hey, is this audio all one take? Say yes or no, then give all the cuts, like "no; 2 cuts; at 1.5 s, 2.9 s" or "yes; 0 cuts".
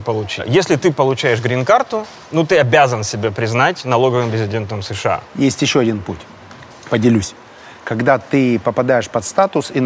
yes; 0 cuts